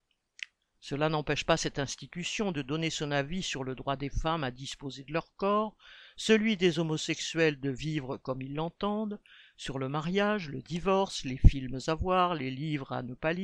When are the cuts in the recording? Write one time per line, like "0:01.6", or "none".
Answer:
none